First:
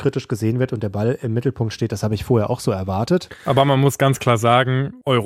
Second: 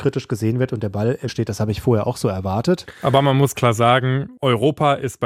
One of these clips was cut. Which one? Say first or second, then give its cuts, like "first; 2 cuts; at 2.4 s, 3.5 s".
second; 2 cuts; at 1.3 s, 3.5 s